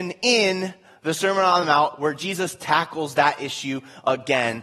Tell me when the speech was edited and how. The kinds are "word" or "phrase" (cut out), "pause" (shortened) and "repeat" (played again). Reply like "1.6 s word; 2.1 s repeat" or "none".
none